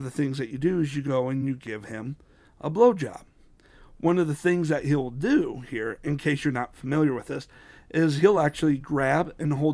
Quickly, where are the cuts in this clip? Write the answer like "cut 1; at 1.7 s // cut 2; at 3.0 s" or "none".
none